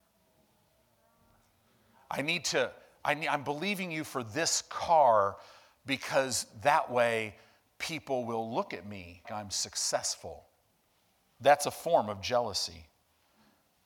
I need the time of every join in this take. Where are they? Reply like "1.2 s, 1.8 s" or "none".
9.2 s, 10.7 s